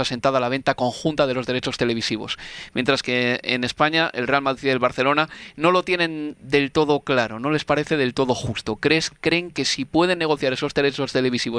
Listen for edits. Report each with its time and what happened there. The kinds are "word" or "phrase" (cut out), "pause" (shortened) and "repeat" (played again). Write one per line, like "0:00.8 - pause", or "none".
none